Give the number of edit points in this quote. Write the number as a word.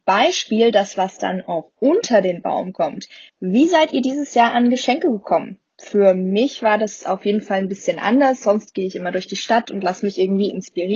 one